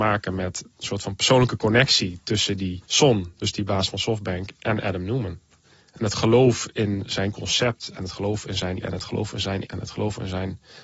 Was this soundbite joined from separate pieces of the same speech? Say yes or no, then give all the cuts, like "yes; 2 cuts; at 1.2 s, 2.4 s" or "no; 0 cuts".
yes; 3 cuts; at 2.9 s, 8.8 s, 9.6 s